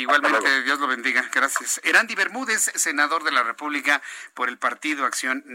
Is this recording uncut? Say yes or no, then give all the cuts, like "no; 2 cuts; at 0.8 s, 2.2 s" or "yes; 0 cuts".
yes; 0 cuts